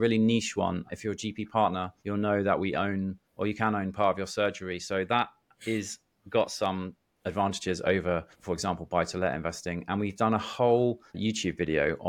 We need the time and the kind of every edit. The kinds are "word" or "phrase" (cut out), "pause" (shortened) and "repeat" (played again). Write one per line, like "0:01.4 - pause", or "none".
0:02.0 - pause
0:03.2 - pause
0:08.3 - pause
0:11.1 - pause